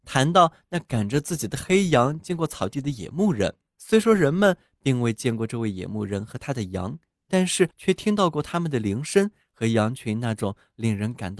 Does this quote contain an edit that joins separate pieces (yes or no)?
yes